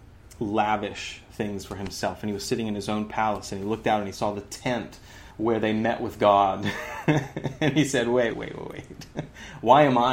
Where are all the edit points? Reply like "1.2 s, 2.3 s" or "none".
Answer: 5.3 s, 8.3 s